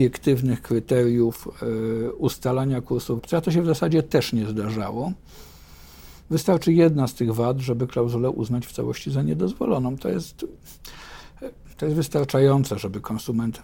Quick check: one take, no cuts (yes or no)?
no